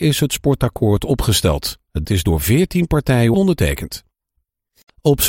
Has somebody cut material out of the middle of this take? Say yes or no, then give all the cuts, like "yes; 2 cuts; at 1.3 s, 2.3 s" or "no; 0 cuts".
yes; 2 cuts; at 2.0 s, 3.3 s